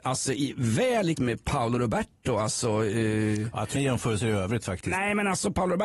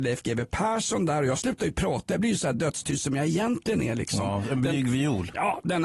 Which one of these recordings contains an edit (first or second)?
first